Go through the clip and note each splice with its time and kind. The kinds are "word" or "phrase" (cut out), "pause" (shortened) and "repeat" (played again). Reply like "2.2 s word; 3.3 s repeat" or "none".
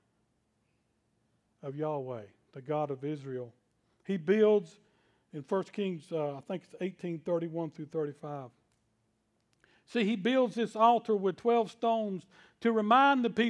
none

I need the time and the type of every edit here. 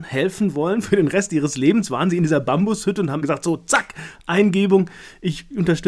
3.2 s word

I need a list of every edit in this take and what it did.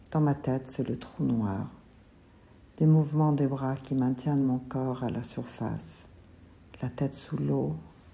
none

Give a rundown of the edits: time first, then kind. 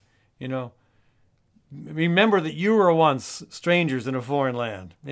none

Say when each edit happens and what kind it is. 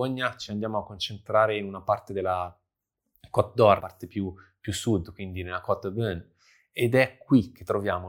3.8 s word

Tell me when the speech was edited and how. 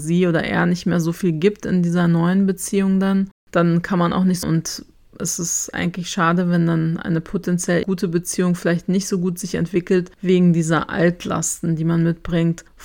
4.4 s phrase; 7.8 s word

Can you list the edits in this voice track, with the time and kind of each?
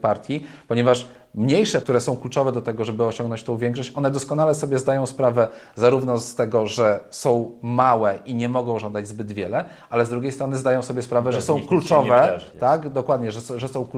1.8 s word; 12.5 s word

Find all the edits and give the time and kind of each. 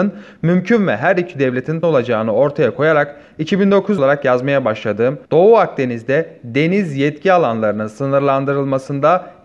1.8 s word; 4.0 s phrase; 5.2 s pause

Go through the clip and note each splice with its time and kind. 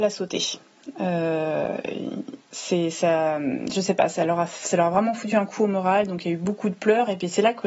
2.5 s pause

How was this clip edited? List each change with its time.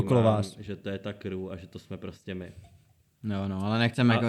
none

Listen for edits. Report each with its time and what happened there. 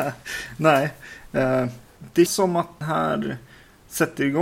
2.3 s word; 2.8 s word

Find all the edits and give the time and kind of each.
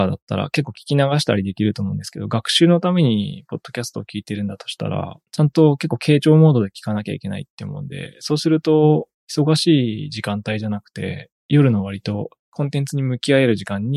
5.3 s pause; 9.2 s pause; 11.4 s pause; 12.4 s pause

